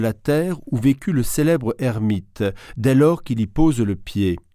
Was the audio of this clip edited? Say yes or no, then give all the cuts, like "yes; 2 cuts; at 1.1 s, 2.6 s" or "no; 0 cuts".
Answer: no; 0 cuts